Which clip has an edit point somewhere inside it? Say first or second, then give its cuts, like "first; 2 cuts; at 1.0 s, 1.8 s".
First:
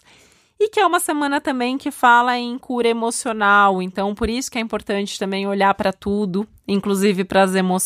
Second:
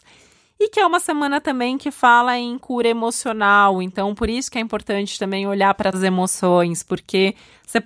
second; 1 cut; at 5.9 s